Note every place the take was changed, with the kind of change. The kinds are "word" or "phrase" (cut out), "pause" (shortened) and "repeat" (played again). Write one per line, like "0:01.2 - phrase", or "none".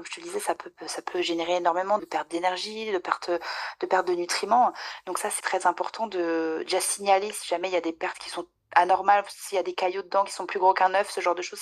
0:02.0 - word
0:05.4 - word
0:08.6 - pause

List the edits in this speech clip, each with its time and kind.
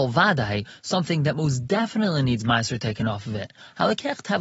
none

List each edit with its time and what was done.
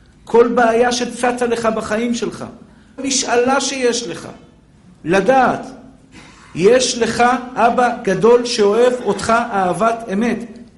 0:03.0 - word

